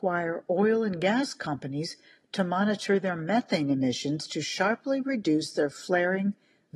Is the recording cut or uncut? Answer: uncut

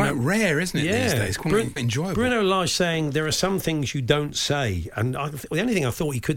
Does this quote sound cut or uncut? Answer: cut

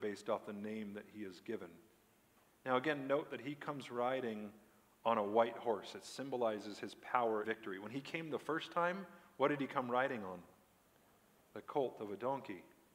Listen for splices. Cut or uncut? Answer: cut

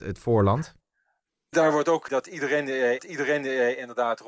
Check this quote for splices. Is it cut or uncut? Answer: cut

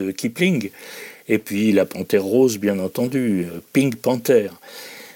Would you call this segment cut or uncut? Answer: uncut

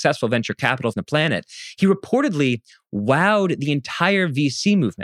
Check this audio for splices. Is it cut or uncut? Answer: cut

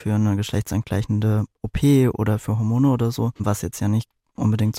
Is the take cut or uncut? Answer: cut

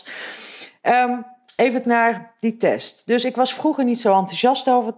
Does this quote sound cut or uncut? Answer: cut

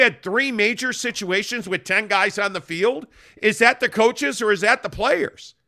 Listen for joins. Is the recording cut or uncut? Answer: uncut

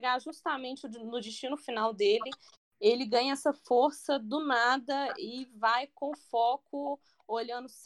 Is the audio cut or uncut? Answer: uncut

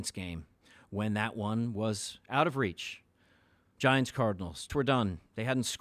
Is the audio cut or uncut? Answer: cut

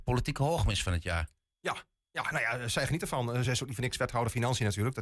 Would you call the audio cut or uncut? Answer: uncut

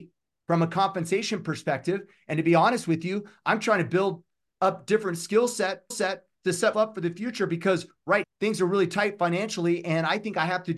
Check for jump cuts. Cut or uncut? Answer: cut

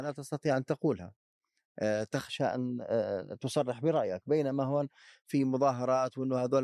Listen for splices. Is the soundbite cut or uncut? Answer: uncut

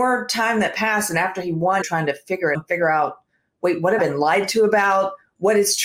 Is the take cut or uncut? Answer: cut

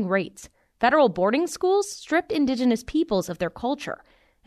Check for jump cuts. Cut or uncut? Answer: uncut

